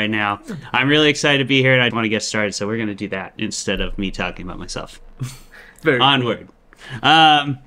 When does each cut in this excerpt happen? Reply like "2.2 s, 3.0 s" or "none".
1.9 s